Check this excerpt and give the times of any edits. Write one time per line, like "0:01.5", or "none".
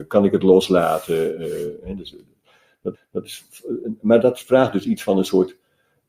0:02.9
0:04.2